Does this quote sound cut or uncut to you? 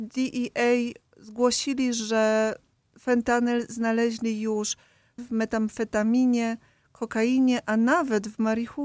cut